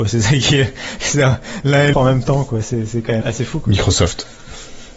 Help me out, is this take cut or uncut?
cut